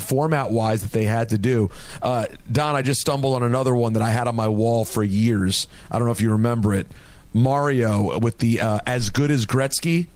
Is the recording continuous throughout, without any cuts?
yes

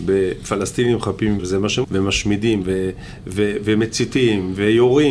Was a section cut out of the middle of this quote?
yes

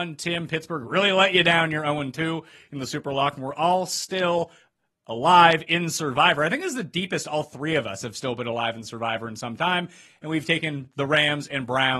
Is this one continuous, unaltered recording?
yes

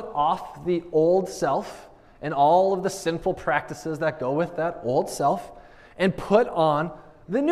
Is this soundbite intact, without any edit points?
yes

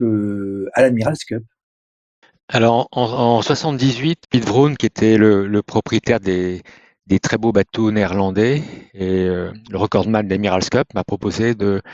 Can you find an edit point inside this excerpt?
yes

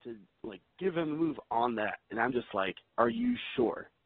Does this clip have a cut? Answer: yes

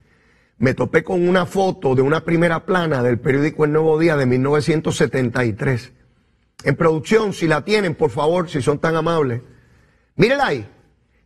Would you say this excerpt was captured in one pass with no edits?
yes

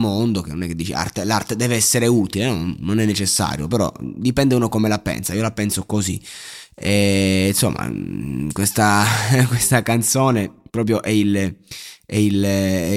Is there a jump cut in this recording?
yes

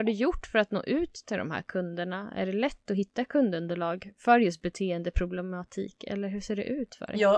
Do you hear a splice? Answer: no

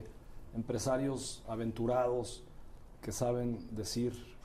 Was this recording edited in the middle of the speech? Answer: yes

